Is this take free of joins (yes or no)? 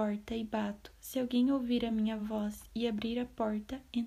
yes